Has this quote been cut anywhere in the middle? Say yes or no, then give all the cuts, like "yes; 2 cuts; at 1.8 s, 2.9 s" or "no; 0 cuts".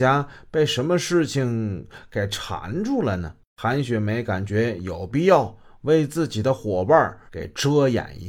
yes; 2 cuts; at 3.5 s, 7.3 s